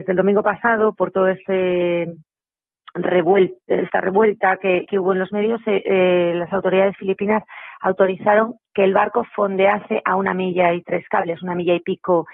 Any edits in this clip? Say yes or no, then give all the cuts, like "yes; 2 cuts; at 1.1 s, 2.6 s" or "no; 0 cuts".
no; 0 cuts